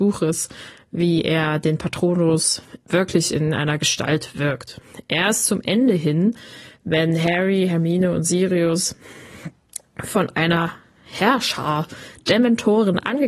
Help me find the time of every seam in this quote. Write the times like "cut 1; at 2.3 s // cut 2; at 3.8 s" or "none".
none

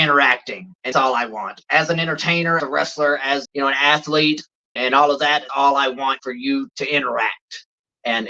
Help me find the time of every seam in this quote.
cut 1; at 0.9 s // cut 2; at 2.6 s // cut 3; at 3.4 s // cut 4; at 4.8 s // cut 5; at 5.5 s // cut 6; at 6.2 s // cut 7; at 6.7 s

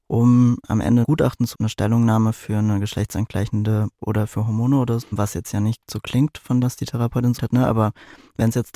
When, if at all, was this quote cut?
cut 1; at 1.0 s // cut 2; at 1.5 s // cut 3; at 4.0 s // cut 4; at 5.0 s // cut 5; at 5.9 s // cut 6; at 6.6 s // cut 7; at 7.4 s

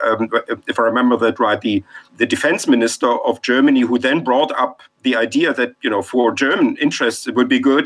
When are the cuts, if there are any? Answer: cut 1; at 2.1 s

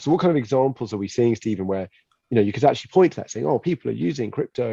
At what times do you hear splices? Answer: none

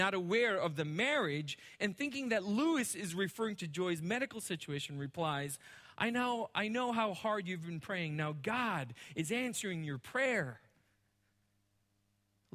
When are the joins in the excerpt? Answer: none

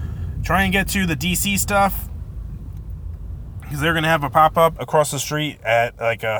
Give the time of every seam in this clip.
cut 1; at 4.8 s

